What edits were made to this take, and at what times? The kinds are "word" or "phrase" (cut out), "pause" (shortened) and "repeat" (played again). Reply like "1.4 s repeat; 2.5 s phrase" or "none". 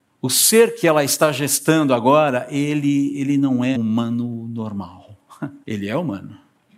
3.7 s word; 5.6 s pause